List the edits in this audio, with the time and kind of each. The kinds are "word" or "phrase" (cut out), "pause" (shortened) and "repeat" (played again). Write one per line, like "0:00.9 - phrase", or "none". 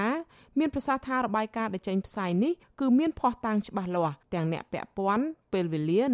0:04.2 - pause